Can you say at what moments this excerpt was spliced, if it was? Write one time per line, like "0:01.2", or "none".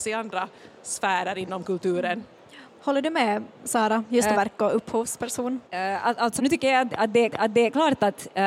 0:04.3
0:05.6
0:06.4
0:07.3